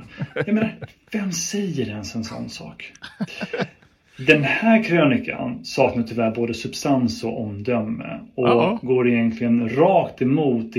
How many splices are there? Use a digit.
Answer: 1